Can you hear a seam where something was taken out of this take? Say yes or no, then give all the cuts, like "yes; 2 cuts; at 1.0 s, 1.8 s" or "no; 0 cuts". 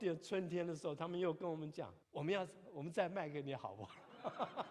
yes; 1 cut; at 2.0 s